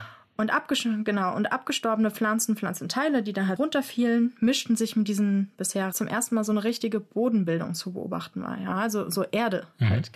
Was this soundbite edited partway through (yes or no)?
yes